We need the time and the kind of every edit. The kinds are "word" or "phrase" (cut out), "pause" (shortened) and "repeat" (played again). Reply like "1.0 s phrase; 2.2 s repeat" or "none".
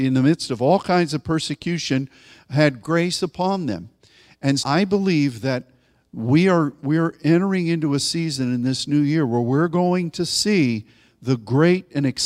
2.8 s word; 4.6 s word